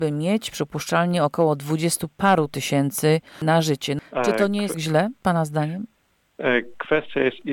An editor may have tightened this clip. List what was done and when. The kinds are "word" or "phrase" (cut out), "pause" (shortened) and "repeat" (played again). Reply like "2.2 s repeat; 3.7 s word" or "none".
4.7 s phrase